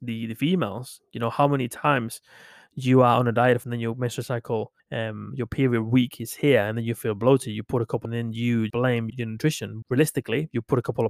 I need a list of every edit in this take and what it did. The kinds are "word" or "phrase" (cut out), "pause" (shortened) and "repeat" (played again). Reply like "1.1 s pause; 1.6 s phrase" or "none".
3.6 s phrase; 4.8 s pause; 8.0 s phrase; 8.7 s word; 9.1 s word; 9.8 s word